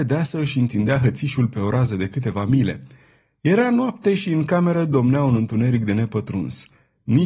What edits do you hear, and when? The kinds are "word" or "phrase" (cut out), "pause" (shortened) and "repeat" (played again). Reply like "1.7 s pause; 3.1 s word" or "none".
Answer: none